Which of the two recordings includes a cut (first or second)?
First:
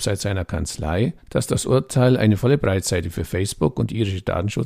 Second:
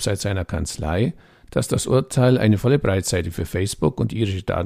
first